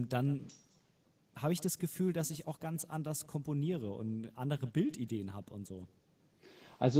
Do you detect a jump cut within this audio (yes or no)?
no